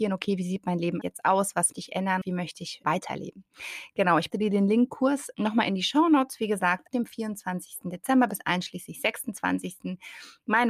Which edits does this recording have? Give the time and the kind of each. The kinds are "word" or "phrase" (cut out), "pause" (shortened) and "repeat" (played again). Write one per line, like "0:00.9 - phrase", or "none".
0:01.0 - word
0:01.7 - word
0:02.2 - word
0:02.8 - word
0:04.3 - word
0:04.9 - word
0:05.3 - word
0:06.9 - word